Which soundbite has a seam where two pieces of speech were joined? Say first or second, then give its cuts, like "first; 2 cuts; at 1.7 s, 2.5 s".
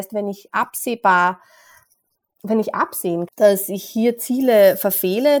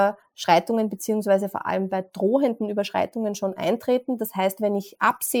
first; 1 cut; at 3.3 s